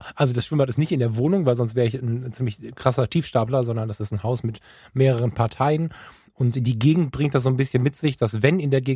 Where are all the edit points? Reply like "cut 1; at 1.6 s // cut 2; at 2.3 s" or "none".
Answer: none